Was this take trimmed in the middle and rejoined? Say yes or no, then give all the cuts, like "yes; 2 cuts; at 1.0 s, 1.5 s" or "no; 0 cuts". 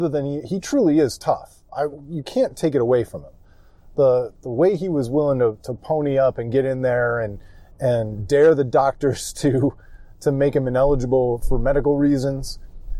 no; 0 cuts